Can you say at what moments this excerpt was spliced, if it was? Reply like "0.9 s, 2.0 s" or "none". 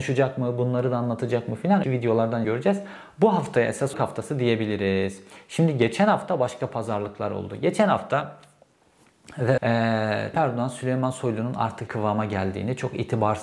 1.8 s, 2.4 s, 3.9 s, 9.6 s, 10.3 s, 11.9 s

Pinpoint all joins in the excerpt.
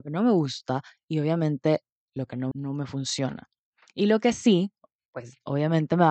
2.5 s

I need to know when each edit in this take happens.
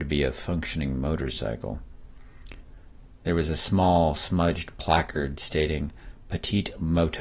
none

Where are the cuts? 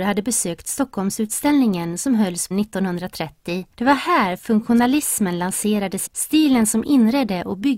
2.5 s, 3.7 s, 6.1 s

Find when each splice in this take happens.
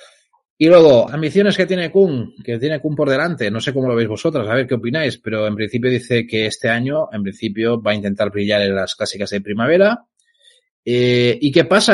1.1 s

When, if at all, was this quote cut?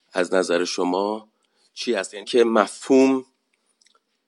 2.2 s

